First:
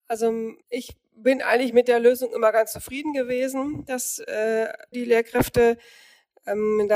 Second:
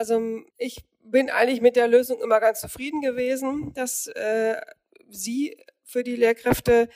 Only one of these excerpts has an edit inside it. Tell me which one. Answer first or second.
first